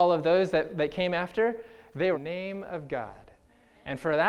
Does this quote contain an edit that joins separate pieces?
yes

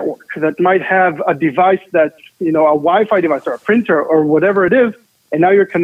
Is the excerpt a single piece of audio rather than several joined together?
yes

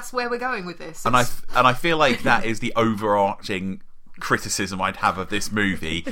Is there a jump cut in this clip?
no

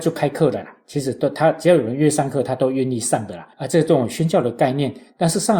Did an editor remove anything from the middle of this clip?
yes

